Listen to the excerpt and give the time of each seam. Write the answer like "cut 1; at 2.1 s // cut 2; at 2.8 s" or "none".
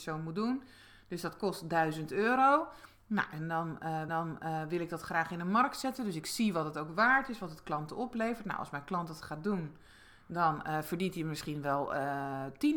cut 1; at 4.1 s